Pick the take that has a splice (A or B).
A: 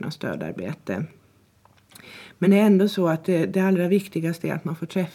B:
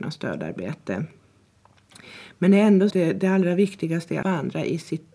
B